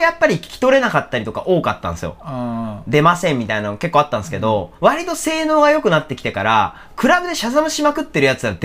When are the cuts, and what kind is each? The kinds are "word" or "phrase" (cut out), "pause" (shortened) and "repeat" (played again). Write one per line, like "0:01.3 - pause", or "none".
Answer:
0:04.8 - pause